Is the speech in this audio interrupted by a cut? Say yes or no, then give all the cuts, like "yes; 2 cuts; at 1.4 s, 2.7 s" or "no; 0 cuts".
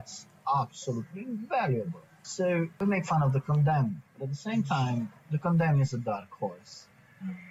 yes; 1 cut; at 5.2 s